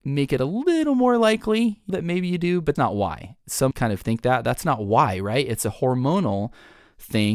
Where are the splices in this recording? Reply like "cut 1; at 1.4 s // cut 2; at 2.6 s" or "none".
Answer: cut 1; at 1.9 s // cut 2; at 2.8 s // cut 3; at 3.7 s